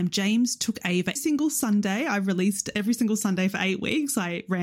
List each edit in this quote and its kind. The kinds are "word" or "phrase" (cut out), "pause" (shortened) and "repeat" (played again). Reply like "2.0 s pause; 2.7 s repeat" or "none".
1.2 s word